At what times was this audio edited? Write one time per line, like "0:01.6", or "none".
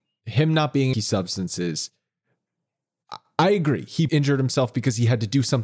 0:00.9
0:04.1